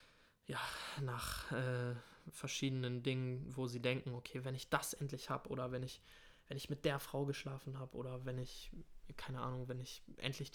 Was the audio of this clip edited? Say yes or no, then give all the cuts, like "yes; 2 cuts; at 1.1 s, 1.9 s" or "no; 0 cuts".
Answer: no; 0 cuts